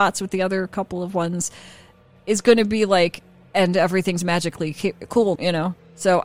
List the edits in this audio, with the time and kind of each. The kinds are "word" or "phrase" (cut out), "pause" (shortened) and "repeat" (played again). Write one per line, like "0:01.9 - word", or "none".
0:05.4 - word